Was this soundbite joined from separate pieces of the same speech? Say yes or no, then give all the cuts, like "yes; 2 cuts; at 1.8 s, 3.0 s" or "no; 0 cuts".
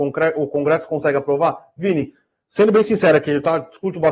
no; 0 cuts